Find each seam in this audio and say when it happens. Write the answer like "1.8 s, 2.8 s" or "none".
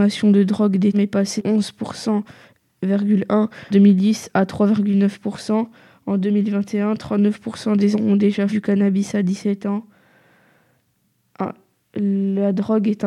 0.9 s, 1.4 s, 3.7 s, 7.9 s, 8.5 s